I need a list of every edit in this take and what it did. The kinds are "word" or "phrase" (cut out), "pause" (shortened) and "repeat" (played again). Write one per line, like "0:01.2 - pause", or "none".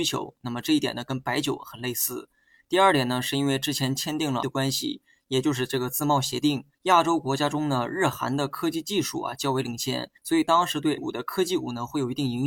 0:04.4 - word
0:06.7 - pause
0:10.2 - pause
0:11.0 - word